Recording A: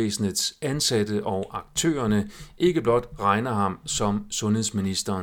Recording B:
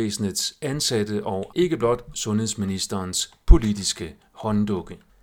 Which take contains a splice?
B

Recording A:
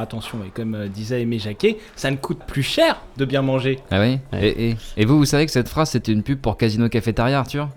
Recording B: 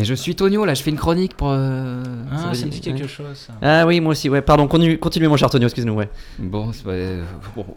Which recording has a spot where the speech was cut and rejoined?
A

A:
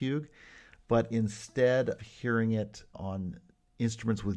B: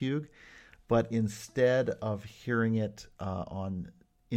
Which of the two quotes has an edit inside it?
A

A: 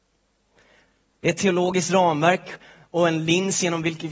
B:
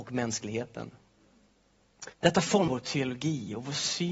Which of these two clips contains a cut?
B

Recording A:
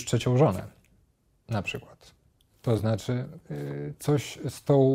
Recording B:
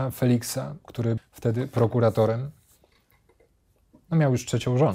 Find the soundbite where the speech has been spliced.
B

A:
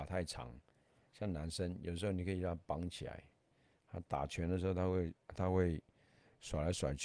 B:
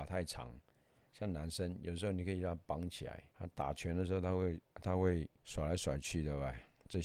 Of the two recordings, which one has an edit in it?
B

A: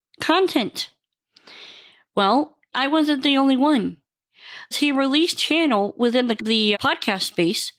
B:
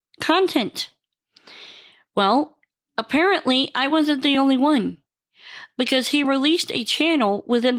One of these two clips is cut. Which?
A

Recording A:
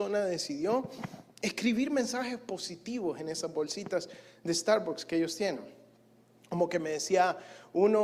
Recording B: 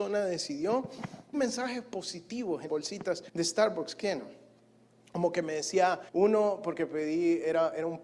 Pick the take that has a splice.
B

